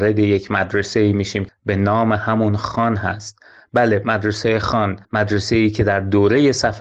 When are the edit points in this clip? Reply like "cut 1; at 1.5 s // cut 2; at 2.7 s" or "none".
cut 1; at 1.5 s // cut 2; at 5.0 s